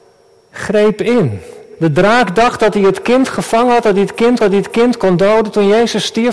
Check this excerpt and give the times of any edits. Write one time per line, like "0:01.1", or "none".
0:04.4